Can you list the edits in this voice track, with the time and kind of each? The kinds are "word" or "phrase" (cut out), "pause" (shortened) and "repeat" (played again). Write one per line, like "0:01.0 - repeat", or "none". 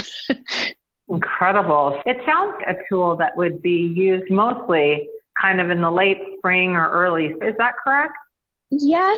0:02.0 - word
0:02.6 - word
0:07.4 - word